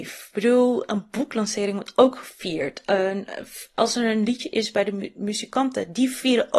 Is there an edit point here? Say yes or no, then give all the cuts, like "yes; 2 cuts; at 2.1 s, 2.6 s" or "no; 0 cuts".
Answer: no; 0 cuts